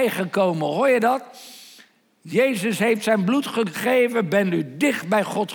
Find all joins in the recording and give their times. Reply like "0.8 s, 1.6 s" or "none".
none